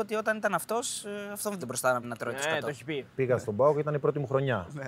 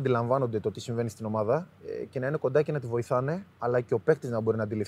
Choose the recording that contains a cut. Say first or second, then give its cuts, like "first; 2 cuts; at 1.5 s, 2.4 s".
first; 3 cuts; at 1.6 s, 2.0 s, 3.1 s